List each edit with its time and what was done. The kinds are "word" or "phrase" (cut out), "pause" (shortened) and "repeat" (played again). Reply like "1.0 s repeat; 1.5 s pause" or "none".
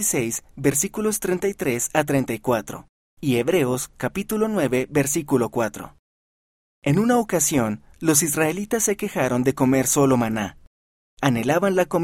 none

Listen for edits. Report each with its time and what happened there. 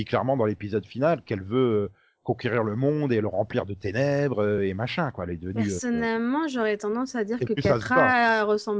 none

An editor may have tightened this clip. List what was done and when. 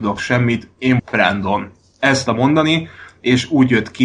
1.0 s word; 2.3 s word

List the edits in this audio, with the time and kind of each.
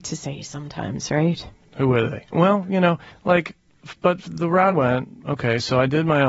3.1 s pause; 4.7 s word

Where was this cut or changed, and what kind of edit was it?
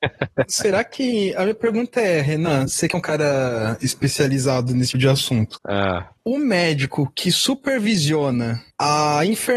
4.9 s word

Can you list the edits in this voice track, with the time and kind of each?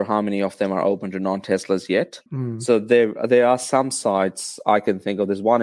2.3 s pause

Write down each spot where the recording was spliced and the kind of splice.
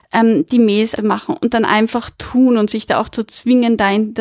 1.0 s phrase

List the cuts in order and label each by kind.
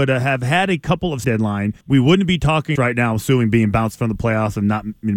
1.2 s phrase; 1.8 s pause; 2.8 s phrase

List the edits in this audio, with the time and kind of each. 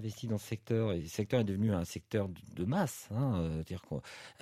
none

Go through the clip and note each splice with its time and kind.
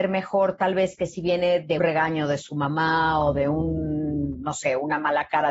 1.8 s word

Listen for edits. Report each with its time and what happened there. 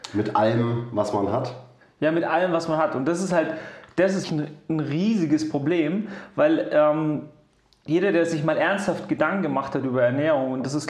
4.2 s word

